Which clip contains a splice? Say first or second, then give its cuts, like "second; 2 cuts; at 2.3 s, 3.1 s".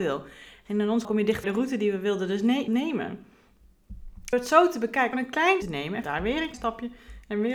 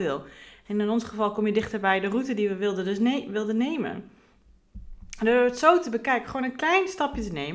first; 8 cuts; at 1.0 s, 1.4 s, 2.7 s, 4.3 s, 5.1 s, 5.6 s, 6.0 s, 6.5 s